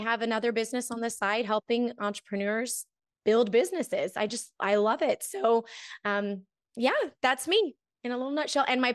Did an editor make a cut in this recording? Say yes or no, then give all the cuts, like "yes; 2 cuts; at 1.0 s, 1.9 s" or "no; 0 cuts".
no; 0 cuts